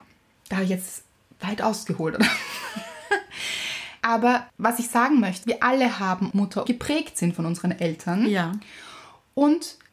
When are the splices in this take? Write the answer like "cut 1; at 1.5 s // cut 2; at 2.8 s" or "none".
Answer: cut 1; at 4.0 s // cut 2; at 5.4 s // cut 3; at 6.3 s // cut 4; at 6.7 s